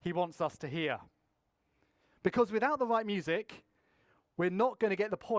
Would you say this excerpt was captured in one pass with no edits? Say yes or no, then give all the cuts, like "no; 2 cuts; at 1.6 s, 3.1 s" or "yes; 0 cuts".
yes; 0 cuts